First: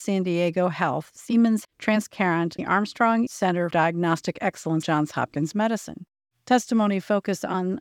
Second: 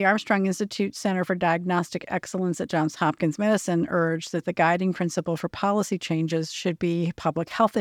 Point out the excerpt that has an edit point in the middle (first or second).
first